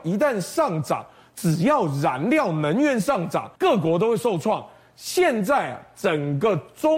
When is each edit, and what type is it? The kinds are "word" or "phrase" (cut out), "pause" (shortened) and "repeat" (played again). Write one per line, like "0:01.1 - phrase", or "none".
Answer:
0:03.6 - pause